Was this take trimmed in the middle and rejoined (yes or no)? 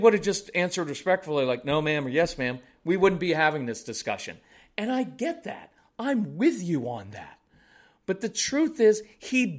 no